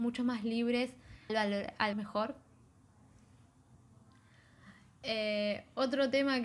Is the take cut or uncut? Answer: cut